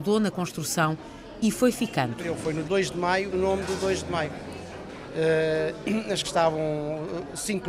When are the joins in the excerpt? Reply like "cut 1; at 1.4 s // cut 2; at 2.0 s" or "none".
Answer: cut 1; at 2.6 s // cut 2; at 3.3 s // cut 3; at 6.2 s